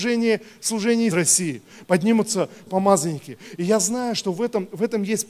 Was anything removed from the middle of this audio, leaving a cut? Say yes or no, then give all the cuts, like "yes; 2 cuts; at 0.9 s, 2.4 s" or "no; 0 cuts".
yes; 2 cuts; at 1.1 s, 2.7 s